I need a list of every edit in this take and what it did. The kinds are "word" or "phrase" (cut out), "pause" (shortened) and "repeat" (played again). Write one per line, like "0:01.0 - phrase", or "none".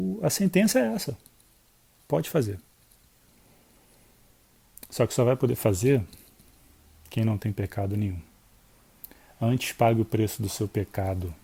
none